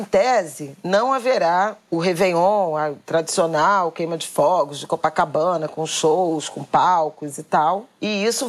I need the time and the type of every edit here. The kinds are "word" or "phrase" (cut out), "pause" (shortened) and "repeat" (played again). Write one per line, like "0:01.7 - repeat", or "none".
none